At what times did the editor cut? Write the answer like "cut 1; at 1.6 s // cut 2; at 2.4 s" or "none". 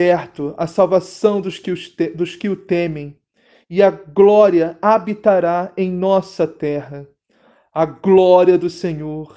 none